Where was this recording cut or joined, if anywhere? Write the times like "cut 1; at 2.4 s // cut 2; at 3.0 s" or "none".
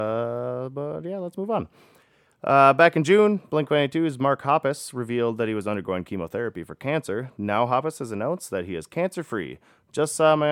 none